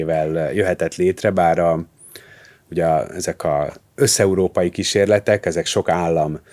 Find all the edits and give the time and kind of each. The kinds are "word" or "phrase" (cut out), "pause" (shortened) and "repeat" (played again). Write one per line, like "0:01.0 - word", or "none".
none

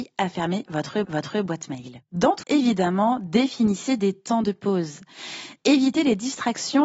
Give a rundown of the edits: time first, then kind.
0:01.0 - repeat
0:02.4 - word

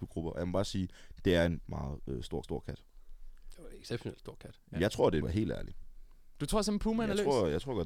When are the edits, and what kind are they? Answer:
0:01.6 - word
0:02.4 - repeat
0:05.2 - phrase

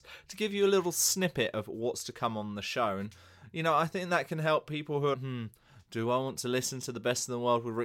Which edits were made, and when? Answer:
0:05.1 - word

